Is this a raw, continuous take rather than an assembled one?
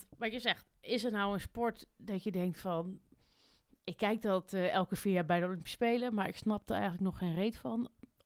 yes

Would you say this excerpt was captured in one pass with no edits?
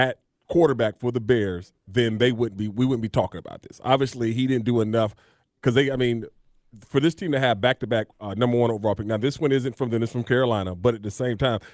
yes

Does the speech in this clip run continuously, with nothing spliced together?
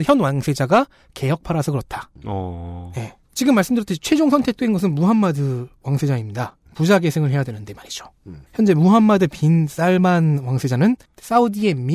no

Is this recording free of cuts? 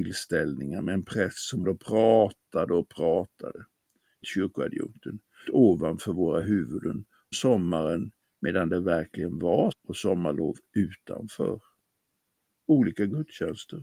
no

